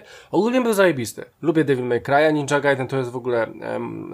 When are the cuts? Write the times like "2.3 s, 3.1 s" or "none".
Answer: 1.3 s